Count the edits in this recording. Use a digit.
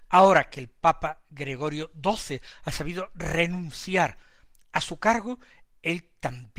0